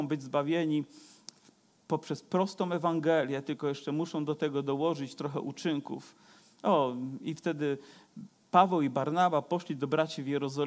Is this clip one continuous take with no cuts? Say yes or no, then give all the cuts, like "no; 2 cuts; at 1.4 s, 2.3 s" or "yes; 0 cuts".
yes; 0 cuts